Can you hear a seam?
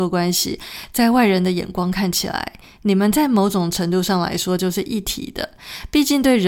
no; 0 cuts

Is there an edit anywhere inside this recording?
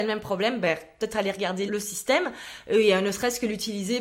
yes; 1 cut; at 1.7 s

